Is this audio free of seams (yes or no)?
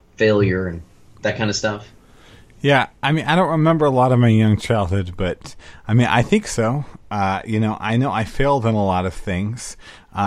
yes